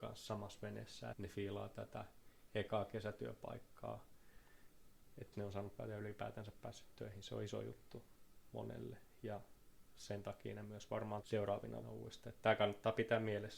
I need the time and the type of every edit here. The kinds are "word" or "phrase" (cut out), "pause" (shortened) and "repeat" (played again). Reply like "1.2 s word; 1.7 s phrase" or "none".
1.1 s word; 5.3 s word; 5.8 s word; 11.2 s word; 11.8 s word